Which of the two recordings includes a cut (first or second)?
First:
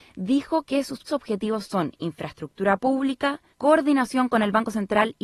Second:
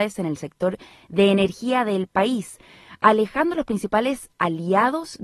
first